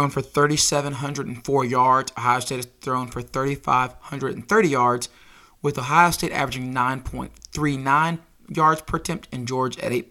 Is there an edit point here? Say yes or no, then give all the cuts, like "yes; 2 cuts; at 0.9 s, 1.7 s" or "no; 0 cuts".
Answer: no; 0 cuts